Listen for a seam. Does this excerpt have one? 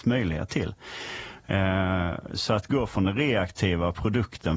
no; 0 cuts

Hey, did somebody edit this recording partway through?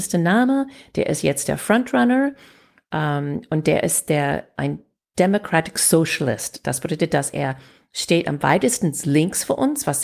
no; 0 cuts

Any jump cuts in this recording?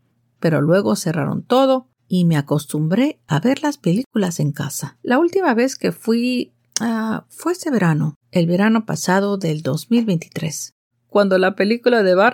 yes; 5 cuts; at 2.0 s, 5.0 s, 6.7 s, 8.2 s, 10.9 s

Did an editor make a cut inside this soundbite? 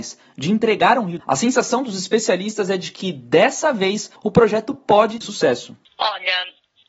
yes; 3 cuts; at 1.2 s, 4.2 s, 5.2 s

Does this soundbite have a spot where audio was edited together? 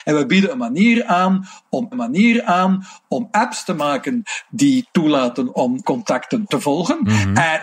yes; 2 cuts; at 1.9 s, 5.8 s

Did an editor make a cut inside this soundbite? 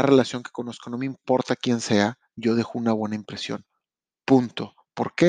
no; 0 cuts

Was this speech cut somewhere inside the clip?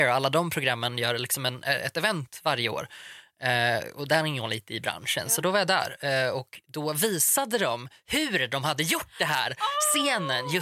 no; 0 cuts

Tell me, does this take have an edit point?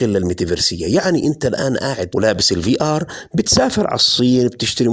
yes; 1 cut; at 2.1 s

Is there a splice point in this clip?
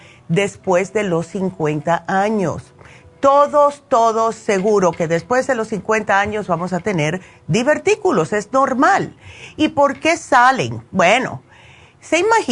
no; 0 cuts

